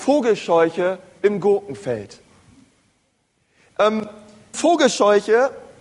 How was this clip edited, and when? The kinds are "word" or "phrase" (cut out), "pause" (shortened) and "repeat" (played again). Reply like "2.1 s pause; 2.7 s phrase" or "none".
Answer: 4.5 s word